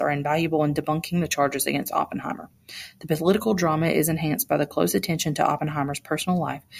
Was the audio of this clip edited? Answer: no; 0 cuts

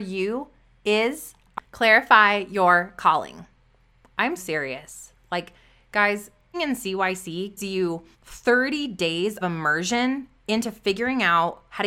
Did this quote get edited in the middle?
yes; 6 cuts; at 1.6 s, 4.4 s, 6.5 s, 7.6 s, 8.1 s, 9.4 s

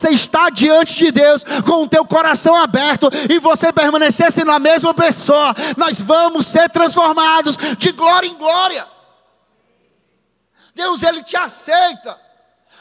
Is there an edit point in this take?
no; 0 cuts

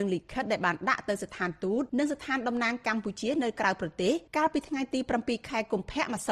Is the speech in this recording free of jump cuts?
no; 2 cuts; at 1.9 s, 4.3 s

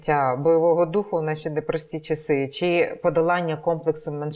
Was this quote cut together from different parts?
no; 0 cuts

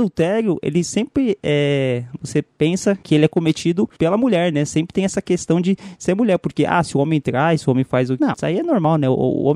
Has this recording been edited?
yes; 1 cut; at 8.2 s

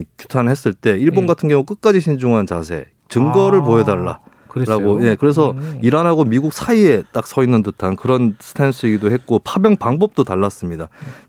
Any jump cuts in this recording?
no; 0 cuts

